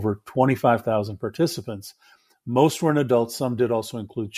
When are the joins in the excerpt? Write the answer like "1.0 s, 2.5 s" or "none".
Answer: none

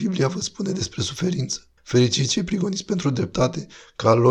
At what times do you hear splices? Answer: 1.8 s

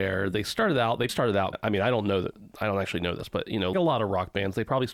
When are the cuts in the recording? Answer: 1.1 s, 1.5 s, 3.7 s

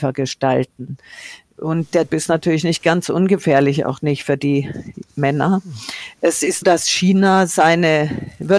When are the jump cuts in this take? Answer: 2.1 s, 6.6 s

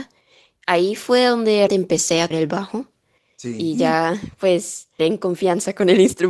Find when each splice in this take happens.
1.7 s, 2.3 s, 5.0 s

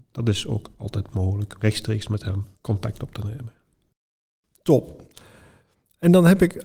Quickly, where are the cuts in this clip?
1.6 s, 2.5 s

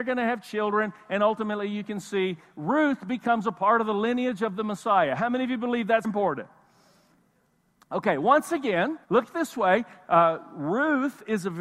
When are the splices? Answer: 6.0 s, 9.0 s

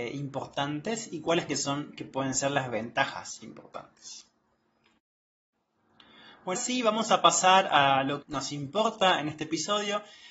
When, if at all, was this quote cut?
1.5 s, 3.4 s, 6.5 s, 8.2 s

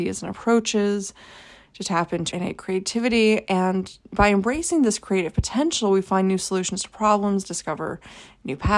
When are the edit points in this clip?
2.3 s, 4.0 s

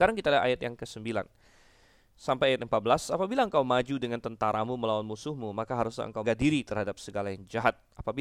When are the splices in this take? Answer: 6.2 s

